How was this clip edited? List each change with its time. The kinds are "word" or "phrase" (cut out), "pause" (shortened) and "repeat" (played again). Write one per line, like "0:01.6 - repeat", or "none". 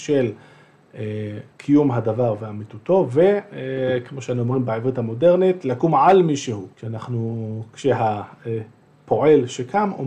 0:01.5 - pause
0:06.7 - pause